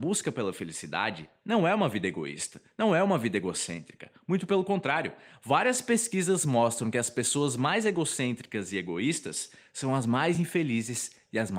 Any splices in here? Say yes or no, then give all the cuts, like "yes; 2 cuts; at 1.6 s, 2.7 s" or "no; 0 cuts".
no; 0 cuts